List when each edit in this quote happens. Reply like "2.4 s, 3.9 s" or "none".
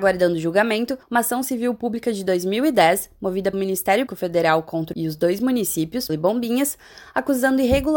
1.0 s, 3.5 s, 4.1 s, 4.9 s, 6.1 s